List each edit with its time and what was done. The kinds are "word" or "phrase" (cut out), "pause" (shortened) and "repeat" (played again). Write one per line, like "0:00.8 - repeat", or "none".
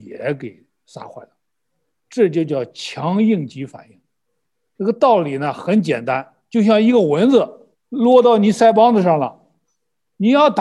0:07.7 - pause